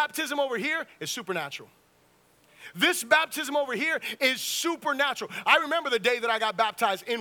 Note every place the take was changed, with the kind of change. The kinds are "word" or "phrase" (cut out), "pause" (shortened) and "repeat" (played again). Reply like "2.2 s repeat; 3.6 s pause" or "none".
none